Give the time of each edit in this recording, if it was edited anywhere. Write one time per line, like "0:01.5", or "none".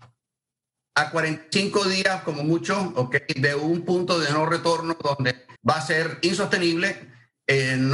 0:05.6